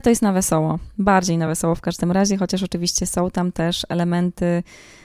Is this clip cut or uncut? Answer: uncut